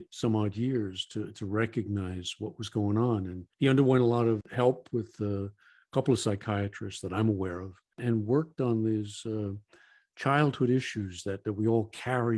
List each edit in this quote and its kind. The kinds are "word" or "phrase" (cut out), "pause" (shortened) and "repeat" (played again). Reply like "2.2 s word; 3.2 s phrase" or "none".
3.5 s pause; 4.4 s word